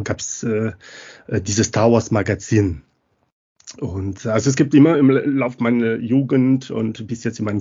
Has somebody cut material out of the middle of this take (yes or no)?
no